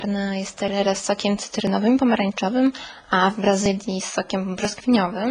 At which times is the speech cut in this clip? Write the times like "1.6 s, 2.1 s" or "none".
none